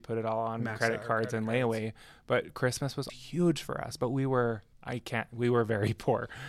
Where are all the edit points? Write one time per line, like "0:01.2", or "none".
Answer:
0:03.1
0:04.7

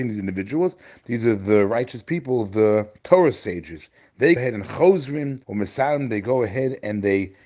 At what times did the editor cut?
0:03.0
0:04.4
0:05.4

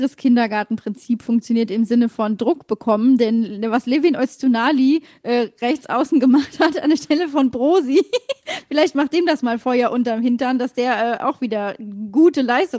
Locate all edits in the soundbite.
none

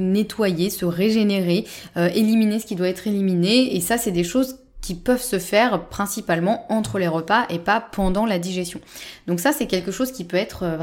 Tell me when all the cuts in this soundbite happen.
none

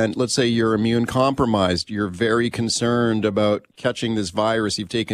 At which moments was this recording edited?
0:03.7

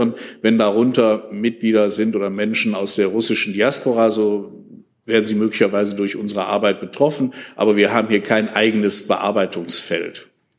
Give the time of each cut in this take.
none

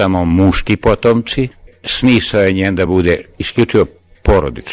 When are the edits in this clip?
none

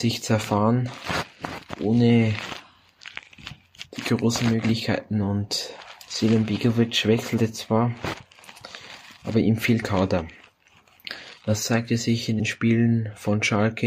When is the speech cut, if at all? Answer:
0:09.8
0:11.4
0:12.4

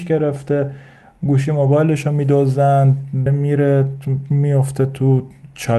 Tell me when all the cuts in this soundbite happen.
0:03.3

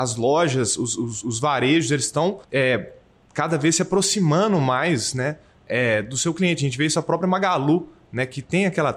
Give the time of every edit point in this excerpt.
0:02.4

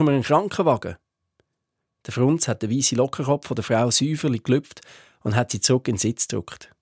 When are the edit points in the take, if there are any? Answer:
none

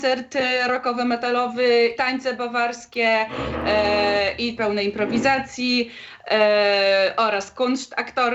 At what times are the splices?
0:02.0
0:04.6

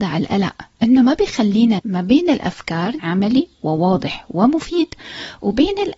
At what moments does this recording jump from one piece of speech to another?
0:01.8
0:03.0

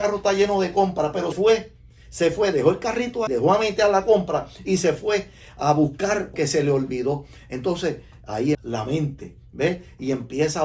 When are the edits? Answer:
0:01.3
0:03.3
0:06.3
0:08.5

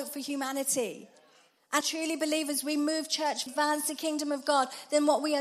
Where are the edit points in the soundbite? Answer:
0:01.8
0:03.5

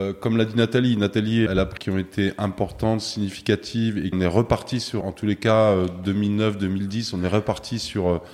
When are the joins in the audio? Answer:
0:01.5
0:01.8
0:04.1
0:05.0

